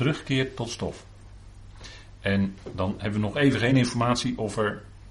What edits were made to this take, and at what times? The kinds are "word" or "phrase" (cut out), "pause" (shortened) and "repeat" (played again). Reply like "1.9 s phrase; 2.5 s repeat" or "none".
none